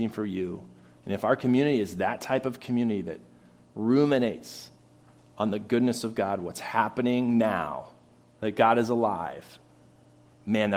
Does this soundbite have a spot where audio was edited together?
no; 0 cuts

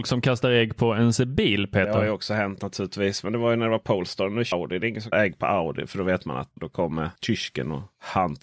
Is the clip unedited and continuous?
no; 4 cuts; at 4.5 s, 5.1 s, 6.6 s, 7.2 s

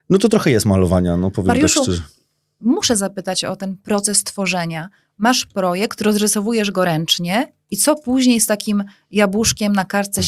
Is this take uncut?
yes; 0 cuts

